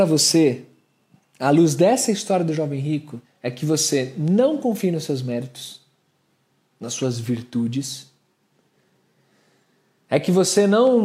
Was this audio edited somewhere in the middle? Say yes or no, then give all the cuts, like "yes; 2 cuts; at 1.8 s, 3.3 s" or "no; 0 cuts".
yes; 1 cut; at 3.2 s